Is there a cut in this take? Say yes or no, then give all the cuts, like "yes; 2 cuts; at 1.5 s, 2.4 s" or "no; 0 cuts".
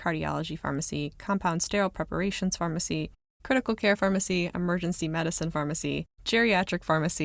no; 0 cuts